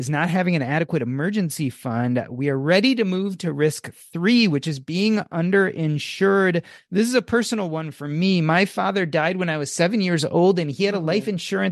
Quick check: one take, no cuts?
yes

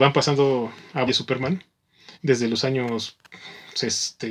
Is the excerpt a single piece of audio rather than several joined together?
no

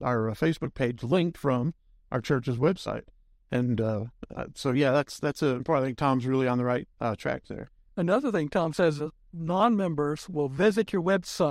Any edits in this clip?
yes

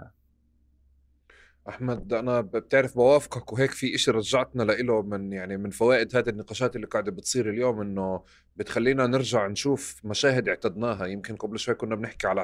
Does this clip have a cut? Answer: no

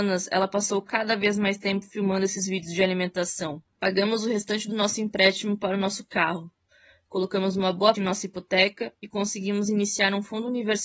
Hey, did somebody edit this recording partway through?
yes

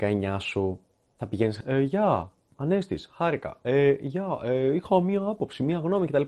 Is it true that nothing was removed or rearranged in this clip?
no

